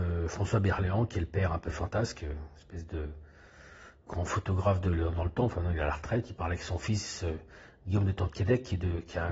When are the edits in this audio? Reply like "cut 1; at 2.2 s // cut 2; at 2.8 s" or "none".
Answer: none